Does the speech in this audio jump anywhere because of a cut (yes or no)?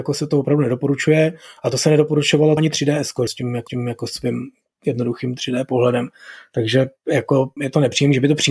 yes